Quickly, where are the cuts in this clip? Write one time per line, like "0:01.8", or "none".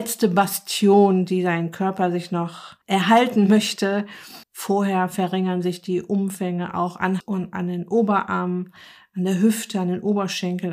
0:02.8
0:04.4
0:07.2

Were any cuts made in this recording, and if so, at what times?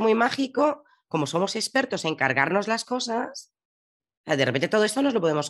none

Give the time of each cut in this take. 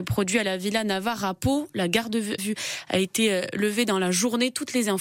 0:02.4

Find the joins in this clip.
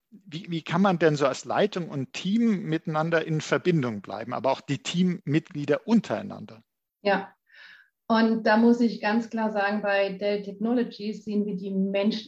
none

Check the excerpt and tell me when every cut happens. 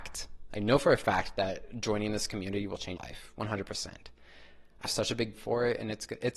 0:03.0
0:04.9
0:05.3

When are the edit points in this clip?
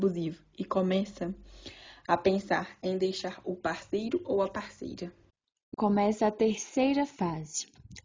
0:05.7

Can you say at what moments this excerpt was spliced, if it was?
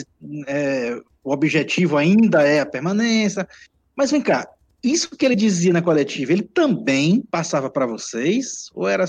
none

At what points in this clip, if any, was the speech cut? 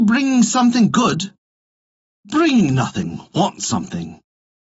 none

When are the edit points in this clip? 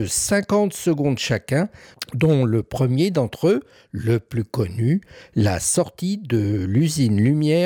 none

